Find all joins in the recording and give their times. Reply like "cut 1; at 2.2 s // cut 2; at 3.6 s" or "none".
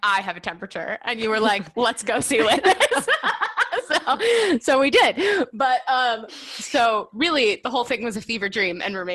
none